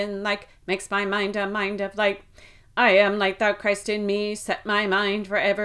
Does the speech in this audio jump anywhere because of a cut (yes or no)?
no